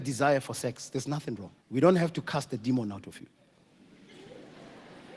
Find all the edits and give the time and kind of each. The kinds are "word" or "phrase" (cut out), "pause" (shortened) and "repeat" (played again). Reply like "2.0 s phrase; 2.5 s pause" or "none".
1.6 s pause